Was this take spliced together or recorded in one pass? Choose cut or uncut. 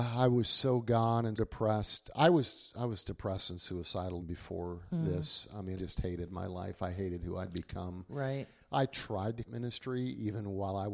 cut